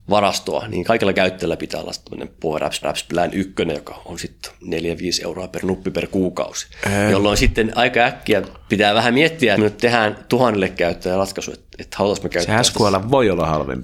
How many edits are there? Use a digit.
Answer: 2